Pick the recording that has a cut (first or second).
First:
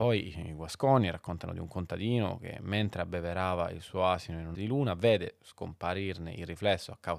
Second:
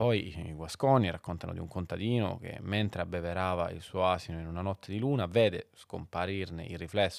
first